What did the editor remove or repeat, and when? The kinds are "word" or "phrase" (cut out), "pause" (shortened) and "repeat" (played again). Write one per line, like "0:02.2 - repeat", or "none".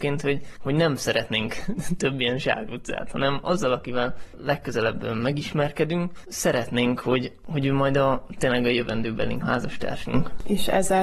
0:09.4 - phrase